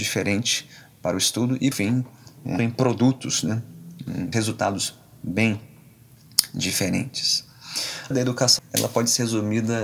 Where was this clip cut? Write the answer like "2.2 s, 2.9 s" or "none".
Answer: 1.7 s, 2.6 s, 4.3 s, 8.1 s, 8.6 s